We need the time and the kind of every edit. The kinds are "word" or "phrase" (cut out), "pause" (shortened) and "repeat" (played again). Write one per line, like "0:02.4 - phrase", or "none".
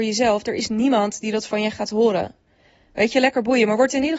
none